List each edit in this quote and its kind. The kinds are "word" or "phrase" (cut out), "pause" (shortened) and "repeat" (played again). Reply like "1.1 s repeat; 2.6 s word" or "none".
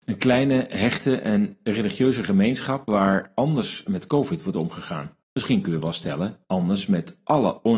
5.2 s pause; 6.4 s pause